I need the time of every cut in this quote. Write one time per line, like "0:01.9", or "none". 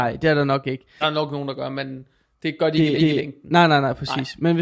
0:01.0
0:03.0